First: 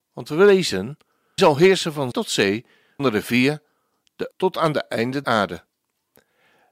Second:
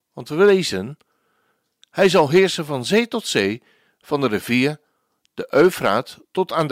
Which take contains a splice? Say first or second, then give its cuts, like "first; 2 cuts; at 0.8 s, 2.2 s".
first; 5 cuts; at 1.4 s, 2.1 s, 3.0 s, 4.3 s, 5.2 s